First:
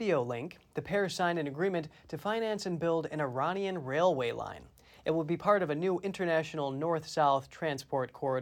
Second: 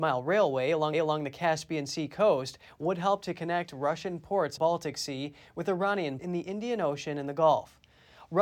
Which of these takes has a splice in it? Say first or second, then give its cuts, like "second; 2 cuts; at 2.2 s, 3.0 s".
second; 3 cuts; at 0.9 s, 4.6 s, 6.2 s